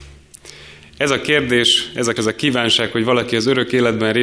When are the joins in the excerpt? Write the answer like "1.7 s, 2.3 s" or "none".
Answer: 2.2 s